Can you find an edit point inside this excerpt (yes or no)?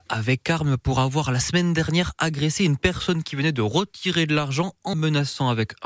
yes